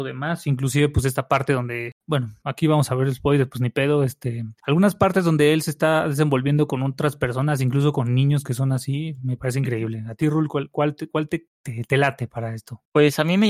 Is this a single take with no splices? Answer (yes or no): no